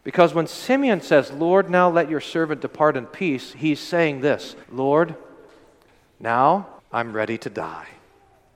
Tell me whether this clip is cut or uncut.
cut